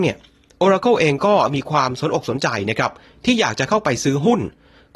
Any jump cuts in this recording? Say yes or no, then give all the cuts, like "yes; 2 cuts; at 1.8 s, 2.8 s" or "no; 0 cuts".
no; 0 cuts